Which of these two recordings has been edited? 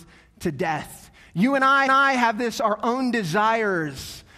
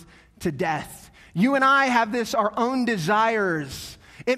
first; 1 cut; at 1.9 s

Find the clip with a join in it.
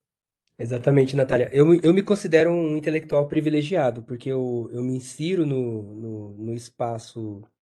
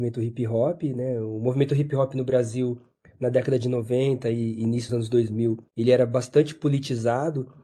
second; 2 cuts; at 4.9 s, 5.7 s

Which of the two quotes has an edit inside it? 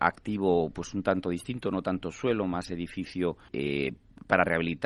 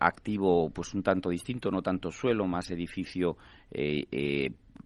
first; 1 cut; at 3.5 s

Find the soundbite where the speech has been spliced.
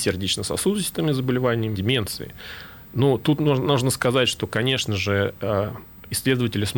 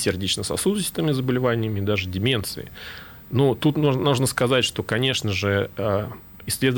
first; 1 cut; at 1.8 s

